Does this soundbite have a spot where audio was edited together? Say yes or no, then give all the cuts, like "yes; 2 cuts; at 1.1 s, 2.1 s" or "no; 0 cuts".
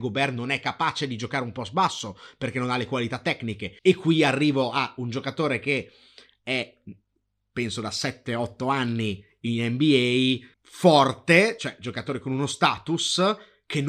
yes; 2 cuts; at 3.8 s, 10.5 s